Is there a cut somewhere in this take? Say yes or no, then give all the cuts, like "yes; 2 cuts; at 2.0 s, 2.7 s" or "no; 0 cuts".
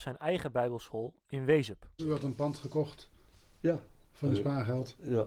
no; 0 cuts